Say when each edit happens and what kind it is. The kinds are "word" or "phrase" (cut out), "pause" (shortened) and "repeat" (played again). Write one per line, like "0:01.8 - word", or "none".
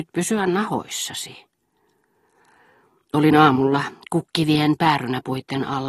none